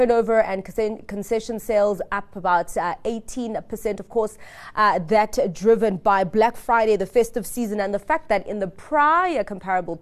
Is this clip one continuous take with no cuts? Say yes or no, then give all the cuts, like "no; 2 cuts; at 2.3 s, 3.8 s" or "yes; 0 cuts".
yes; 0 cuts